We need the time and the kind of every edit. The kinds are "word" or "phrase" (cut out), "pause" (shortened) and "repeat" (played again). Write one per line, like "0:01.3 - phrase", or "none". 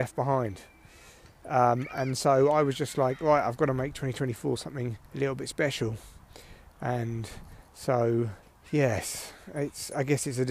0:05.1 - pause
0:08.4 - pause